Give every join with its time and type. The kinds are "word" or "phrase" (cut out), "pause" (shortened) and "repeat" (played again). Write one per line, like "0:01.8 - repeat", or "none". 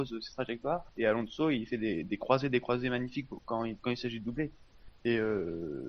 0:05.0 - pause